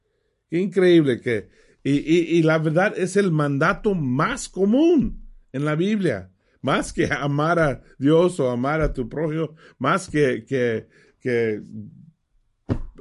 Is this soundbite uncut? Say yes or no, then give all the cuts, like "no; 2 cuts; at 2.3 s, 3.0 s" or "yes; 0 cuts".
yes; 0 cuts